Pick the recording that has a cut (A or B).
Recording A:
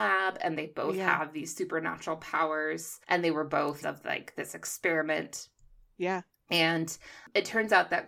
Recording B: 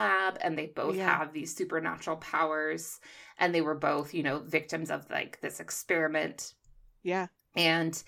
A